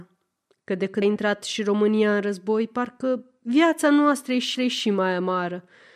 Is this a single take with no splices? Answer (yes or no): no